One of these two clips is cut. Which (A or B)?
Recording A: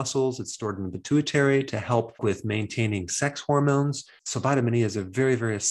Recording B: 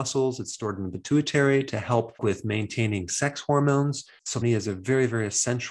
B